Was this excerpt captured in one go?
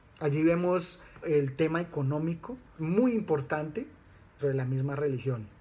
no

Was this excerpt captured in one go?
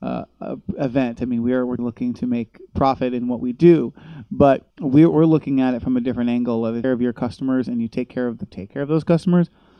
no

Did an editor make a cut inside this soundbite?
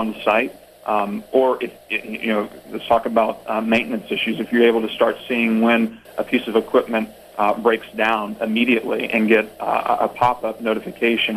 no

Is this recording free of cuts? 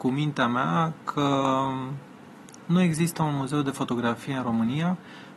yes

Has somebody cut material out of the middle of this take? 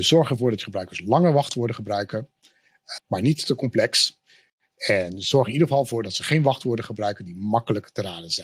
yes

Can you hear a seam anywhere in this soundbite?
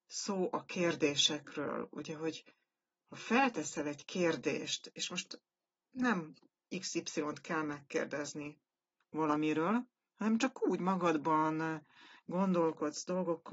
no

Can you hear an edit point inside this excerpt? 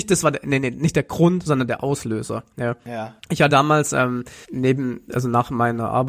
yes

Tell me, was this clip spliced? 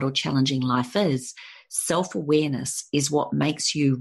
no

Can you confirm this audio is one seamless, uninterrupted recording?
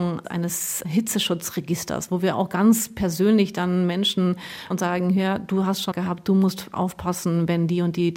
no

